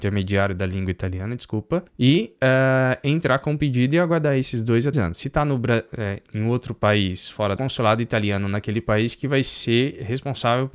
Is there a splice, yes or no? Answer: yes